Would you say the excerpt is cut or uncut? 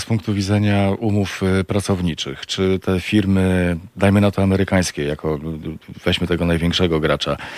uncut